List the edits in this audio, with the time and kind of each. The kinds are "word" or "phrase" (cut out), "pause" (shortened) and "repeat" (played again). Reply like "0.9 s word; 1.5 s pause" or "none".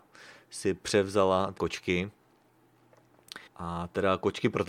1.6 s word; 3.5 s pause